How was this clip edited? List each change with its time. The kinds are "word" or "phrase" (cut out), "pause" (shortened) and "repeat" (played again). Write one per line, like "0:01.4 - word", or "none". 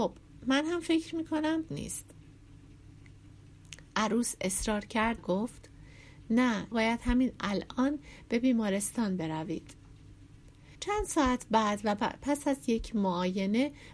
0:01.7 - phrase
0:05.2 - word
0:06.7 - word
0:10.7 - pause